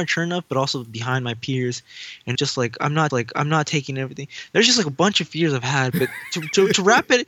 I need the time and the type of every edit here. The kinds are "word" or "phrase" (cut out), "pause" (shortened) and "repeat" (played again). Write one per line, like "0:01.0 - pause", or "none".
0:02.3 - word
0:03.1 - repeat